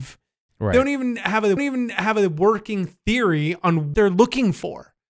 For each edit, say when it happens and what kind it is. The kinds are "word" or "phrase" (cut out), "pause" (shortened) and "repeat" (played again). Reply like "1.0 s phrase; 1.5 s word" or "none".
1.6 s repeat; 3.9 s word